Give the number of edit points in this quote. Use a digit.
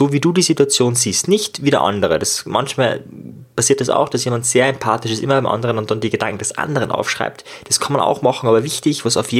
0